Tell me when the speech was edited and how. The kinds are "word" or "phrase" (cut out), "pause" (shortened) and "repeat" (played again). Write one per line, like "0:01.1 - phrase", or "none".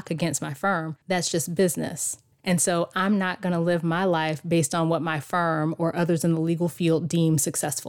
0:01.0 - pause
0:02.3 - pause